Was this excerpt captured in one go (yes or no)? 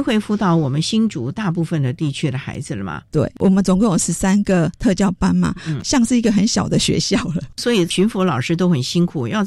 yes